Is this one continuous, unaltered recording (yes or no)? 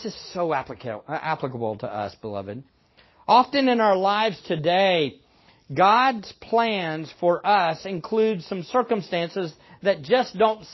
yes